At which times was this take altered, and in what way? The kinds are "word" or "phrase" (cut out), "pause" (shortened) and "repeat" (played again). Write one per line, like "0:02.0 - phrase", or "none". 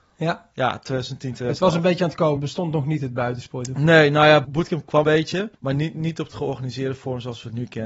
0:02.4 - word
0:04.4 - word
0:05.0 - word
0:05.5 - pause